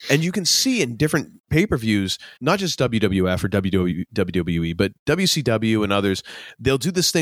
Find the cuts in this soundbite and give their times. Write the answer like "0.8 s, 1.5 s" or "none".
1.4 s, 2.4 s